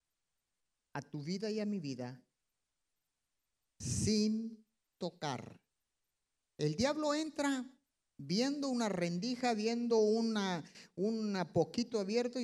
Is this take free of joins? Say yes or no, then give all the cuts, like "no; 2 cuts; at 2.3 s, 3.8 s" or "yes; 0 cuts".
yes; 0 cuts